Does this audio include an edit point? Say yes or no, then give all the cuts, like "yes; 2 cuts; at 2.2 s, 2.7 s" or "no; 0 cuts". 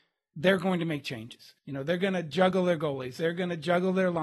yes; 1 cut; at 1.6 s